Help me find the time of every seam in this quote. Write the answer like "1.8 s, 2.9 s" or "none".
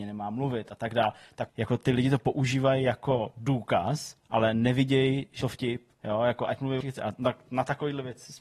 1.5 s, 5.4 s, 5.9 s, 6.8 s